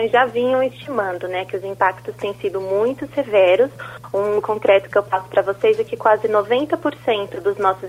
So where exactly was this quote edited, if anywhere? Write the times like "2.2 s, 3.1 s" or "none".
4.4 s